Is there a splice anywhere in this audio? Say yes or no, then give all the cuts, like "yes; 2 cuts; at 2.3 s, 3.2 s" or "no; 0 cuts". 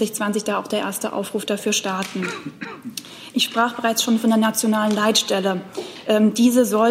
no; 0 cuts